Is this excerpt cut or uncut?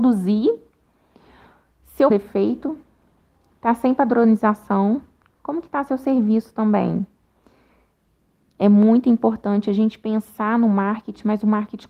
cut